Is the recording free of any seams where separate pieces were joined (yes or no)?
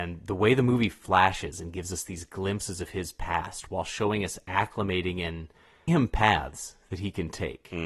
no